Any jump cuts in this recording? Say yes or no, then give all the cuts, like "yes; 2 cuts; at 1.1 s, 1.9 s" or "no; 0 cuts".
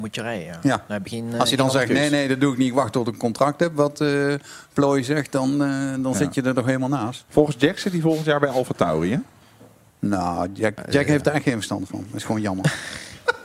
no; 0 cuts